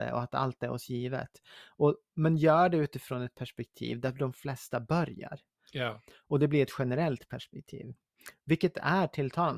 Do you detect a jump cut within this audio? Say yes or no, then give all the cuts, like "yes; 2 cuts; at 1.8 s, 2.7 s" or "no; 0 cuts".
no; 0 cuts